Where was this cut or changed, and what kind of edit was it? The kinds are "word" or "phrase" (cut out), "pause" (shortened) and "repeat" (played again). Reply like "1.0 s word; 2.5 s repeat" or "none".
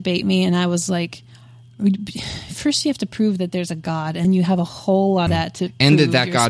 4.2 s word; 5.3 s phrase